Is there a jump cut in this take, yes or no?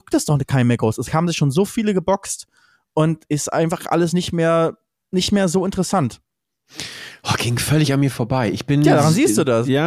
no